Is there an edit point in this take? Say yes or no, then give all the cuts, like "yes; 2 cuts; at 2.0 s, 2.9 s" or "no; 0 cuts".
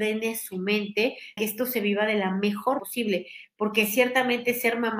yes; 2 cuts; at 1.4 s, 2.8 s